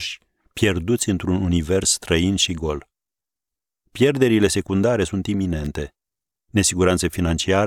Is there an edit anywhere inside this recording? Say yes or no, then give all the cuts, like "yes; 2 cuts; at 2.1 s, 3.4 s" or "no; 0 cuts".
no; 0 cuts